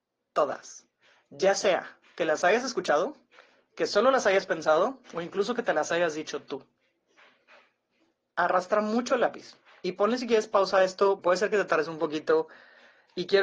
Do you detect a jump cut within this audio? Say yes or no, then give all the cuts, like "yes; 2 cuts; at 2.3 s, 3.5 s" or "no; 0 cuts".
yes; 1 cut; at 11.2 s